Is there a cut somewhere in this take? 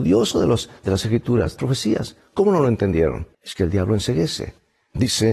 yes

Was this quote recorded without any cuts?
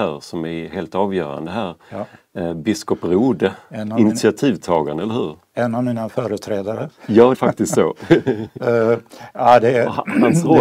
no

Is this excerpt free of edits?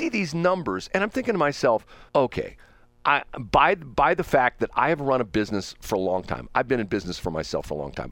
no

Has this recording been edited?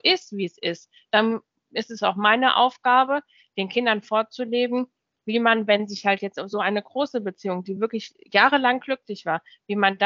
no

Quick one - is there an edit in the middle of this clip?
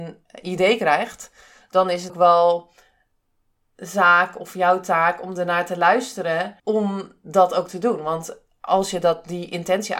yes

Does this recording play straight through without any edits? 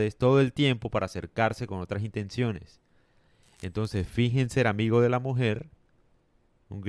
yes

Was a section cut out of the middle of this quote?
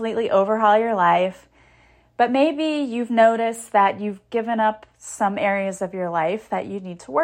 no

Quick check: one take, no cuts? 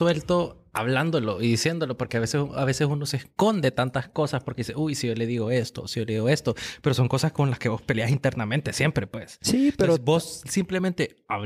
yes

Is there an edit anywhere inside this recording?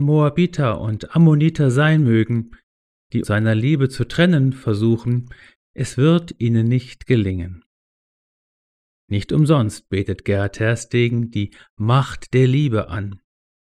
yes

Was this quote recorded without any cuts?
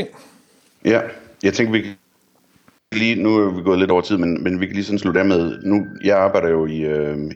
yes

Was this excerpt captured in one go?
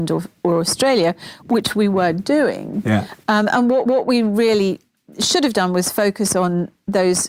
no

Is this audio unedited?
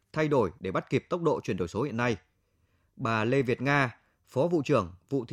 yes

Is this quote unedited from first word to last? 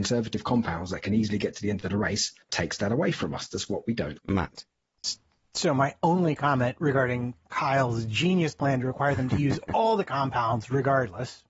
no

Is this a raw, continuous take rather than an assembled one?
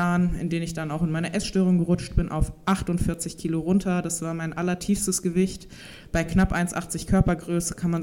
yes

